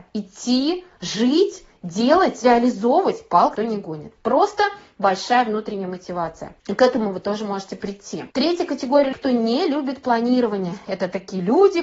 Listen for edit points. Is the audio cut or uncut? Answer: cut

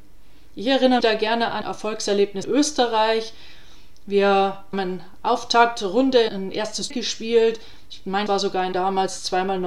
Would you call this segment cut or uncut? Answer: cut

